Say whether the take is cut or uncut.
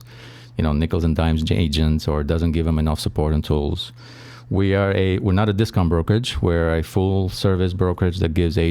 uncut